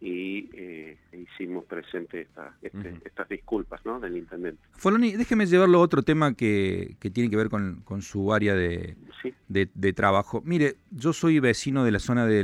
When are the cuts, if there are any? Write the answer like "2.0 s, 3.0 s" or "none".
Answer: 1.1 s, 4.7 s